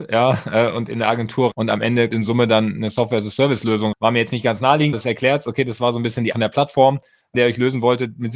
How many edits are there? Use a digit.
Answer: 7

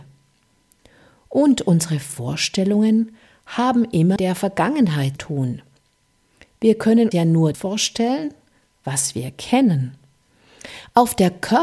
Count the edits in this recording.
4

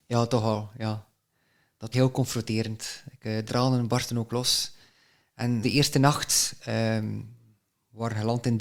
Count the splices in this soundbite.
3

